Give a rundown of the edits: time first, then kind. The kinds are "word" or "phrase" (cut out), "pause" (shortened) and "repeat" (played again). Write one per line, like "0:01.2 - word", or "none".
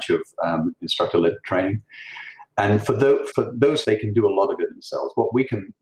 0:03.3 - word
0:03.8 - word